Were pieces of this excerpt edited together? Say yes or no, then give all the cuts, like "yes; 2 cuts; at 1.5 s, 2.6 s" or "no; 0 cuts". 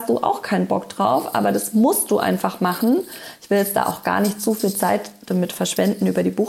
no; 0 cuts